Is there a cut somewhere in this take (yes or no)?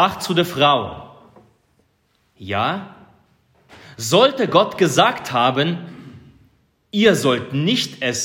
no